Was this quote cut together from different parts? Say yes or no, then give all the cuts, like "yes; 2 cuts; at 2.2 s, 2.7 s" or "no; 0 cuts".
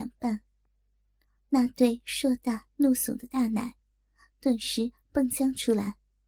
no; 0 cuts